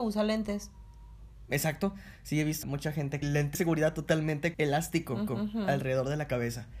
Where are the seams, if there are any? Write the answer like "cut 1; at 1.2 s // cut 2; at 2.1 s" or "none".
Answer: cut 1; at 2.6 s // cut 2; at 3.2 s // cut 3; at 3.5 s // cut 4; at 4.5 s // cut 5; at 5.3 s